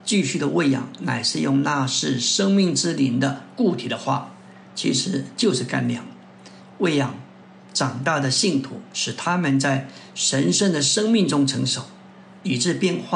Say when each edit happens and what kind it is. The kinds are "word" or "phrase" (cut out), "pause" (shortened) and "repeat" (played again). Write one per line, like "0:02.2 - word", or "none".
none